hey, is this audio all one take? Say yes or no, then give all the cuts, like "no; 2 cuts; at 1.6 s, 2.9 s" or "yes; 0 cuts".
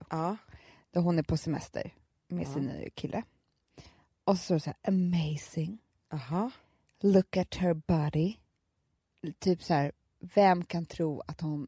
yes; 0 cuts